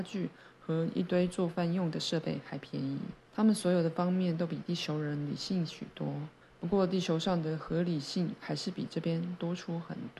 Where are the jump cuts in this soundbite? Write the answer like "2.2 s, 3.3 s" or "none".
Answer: 3.3 s, 6.4 s